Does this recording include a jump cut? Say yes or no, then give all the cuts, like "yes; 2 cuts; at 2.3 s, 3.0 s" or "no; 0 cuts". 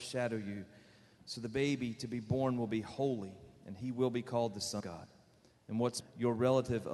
yes; 2 cuts; at 4.8 s, 6.0 s